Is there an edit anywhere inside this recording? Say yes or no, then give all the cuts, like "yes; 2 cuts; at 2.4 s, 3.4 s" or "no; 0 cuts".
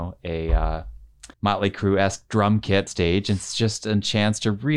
yes; 2 cuts; at 1.3 s, 2.9 s